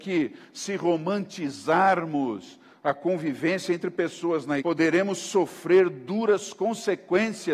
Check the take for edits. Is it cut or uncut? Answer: cut